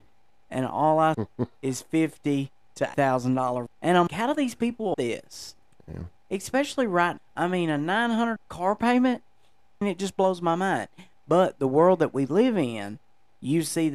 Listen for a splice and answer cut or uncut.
cut